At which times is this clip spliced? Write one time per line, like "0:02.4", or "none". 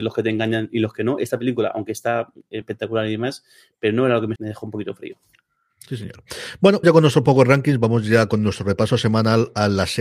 0:02.6
0:04.4
0:06.8